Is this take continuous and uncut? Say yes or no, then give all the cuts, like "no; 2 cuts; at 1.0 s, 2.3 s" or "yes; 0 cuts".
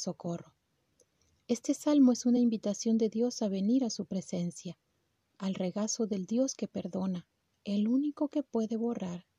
yes; 0 cuts